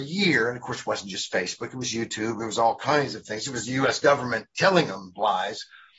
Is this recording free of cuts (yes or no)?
yes